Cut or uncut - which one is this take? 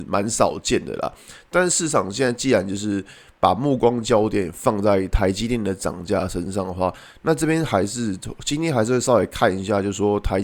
uncut